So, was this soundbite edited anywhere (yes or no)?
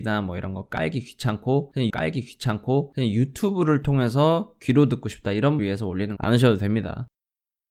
yes